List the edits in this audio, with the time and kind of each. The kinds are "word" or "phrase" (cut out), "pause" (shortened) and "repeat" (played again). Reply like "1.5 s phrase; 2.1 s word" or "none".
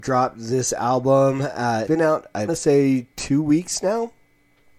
1.9 s word; 2.5 s word; 3.1 s pause